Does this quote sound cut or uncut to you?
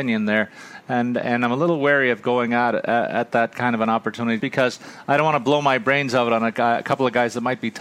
cut